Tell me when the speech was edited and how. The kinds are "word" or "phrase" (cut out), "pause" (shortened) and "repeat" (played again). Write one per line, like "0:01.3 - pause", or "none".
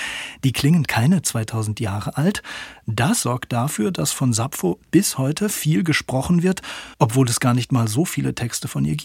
0:03.2 - word
0:06.9 - pause